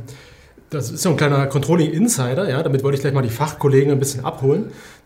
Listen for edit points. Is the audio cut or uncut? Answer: uncut